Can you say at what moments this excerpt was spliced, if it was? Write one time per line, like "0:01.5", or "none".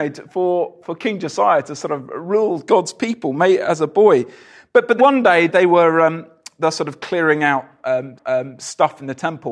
0:05.0
0:05.5
0:08.2